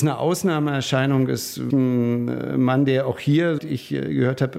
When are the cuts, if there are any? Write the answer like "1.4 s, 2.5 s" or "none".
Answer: 1.7 s, 3.6 s

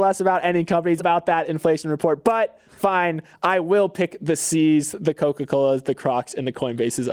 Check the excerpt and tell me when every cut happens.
1.0 s

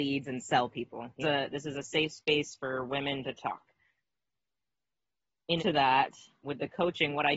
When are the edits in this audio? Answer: 1.2 s, 5.6 s, 6.4 s

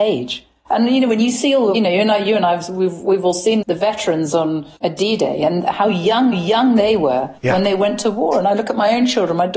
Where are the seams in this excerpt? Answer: 1.7 s, 3.6 s, 4.8 s, 6.3 s, 7.4 s

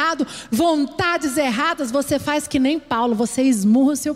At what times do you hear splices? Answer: none

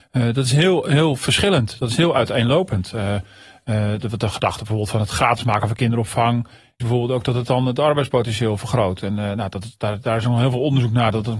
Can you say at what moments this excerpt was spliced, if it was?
6.8 s

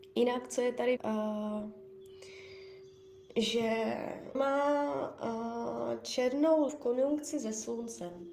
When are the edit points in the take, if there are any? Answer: 1.0 s, 4.3 s, 6.7 s

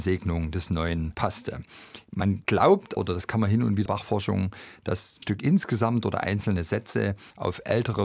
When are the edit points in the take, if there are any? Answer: 1.1 s, 3.0 s, 3.9 s, 5.2 s

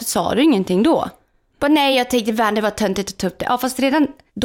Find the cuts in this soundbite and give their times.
none

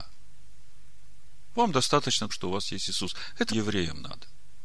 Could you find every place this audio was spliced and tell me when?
2.3 s, 3.5 s

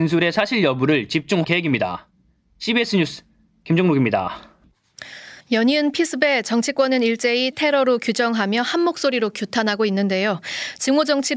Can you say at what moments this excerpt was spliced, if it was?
1.4 s, 5.4 s, 7.5 s

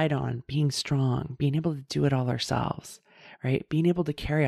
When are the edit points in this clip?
none

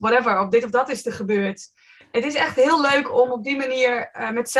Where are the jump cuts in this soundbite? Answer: none

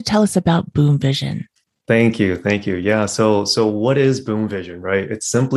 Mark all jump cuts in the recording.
1.6 s

